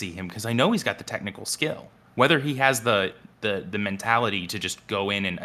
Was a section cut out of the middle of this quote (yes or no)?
no